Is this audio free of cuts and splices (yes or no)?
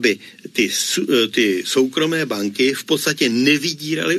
yes